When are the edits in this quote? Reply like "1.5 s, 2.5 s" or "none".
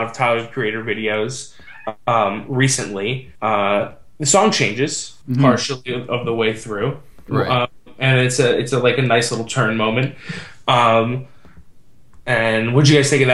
3.3 s, 5.2 s